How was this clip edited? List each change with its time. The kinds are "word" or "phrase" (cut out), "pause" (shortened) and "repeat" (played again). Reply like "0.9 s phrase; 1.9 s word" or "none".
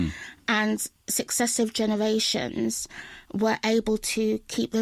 none